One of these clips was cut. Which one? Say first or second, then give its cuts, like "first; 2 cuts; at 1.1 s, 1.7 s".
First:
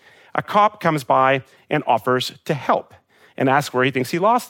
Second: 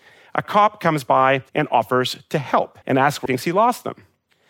second; 3 cuts; at 1.5 s, 2.8 s, 3.3 s